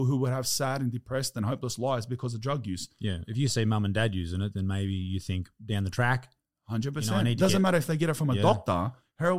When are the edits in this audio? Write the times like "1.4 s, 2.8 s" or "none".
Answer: none